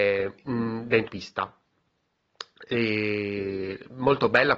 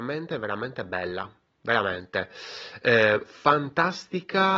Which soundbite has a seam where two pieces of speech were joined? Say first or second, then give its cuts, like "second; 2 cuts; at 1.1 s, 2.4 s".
first; 1 cut; at 1.1 s